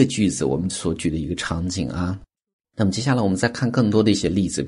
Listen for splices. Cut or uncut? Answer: uncut